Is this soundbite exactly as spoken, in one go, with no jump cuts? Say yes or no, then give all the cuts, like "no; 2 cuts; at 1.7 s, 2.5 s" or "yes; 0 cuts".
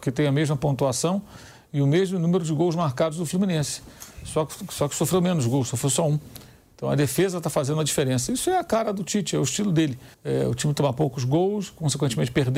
no; 1 cut; at 10.1 s